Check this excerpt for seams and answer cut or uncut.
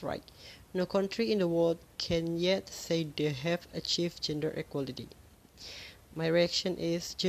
uncut